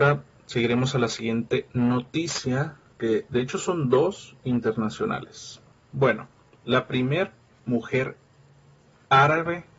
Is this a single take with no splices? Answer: yes; 0 cuts

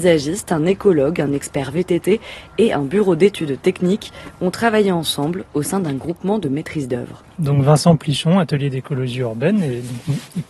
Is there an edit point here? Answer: no; 0 cuts

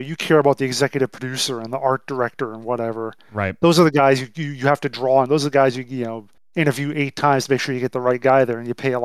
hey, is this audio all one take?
no; 1 cut; at 6.4 s

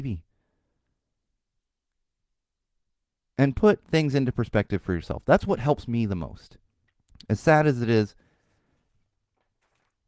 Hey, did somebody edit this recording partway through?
yes; 1 cut; at 6.8 s

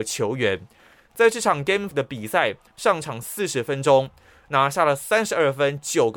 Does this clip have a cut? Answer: yes; 1 cut; at 1.9 s

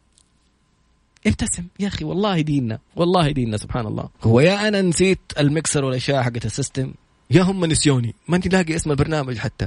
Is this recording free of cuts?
no; 2 cuts; at 1.7 s, 4.1 s

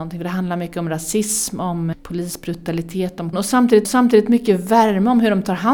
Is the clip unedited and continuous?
no; 3 cuts; at 1.9 s, 3.3 s, 3.8 s

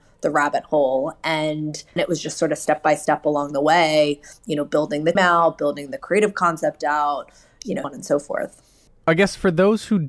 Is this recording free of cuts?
no; 3 cuts; at 2.0 s, 5.2 s, 7.8 s

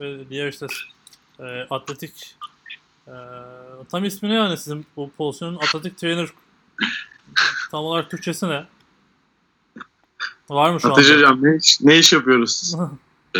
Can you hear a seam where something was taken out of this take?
no; 0 cuts

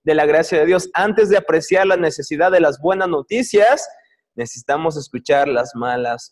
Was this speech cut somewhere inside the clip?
no; 0 cuts

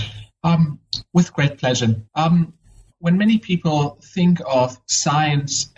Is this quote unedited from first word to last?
no; 2 cuts; at 1.3 s, 2.1 s

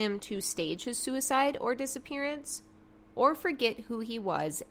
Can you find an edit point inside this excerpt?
no; 0 cuts

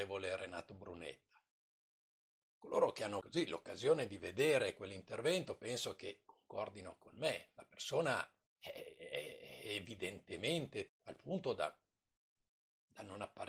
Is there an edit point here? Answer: yes; 3 cuts; at 3.2 s, 8.5 s, 10.9 s

